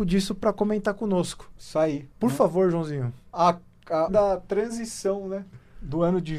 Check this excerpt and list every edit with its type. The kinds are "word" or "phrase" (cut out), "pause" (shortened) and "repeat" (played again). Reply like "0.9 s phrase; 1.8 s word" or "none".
2.1 s pause; 4.1 s phrase